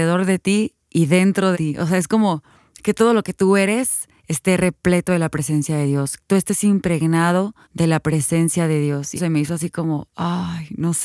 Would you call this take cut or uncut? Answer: cut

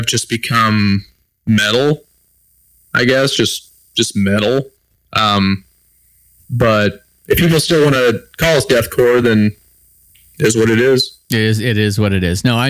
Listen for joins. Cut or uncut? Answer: uncut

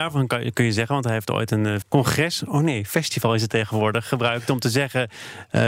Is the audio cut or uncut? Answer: cut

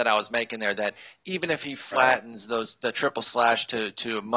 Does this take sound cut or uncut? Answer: uncut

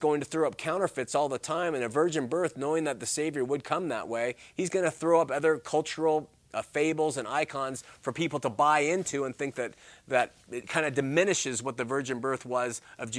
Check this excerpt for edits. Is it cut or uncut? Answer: cut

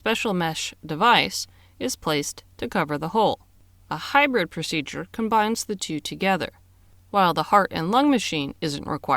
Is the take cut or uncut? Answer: uncut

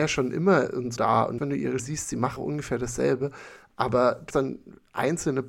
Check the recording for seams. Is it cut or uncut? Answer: cut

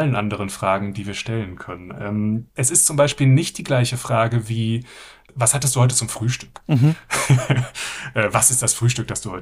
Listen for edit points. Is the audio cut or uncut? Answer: uncut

